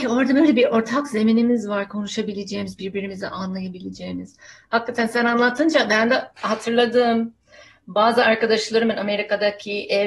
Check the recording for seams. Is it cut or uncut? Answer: uncut